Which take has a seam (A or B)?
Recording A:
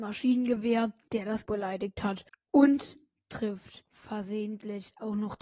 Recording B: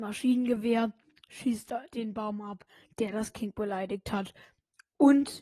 A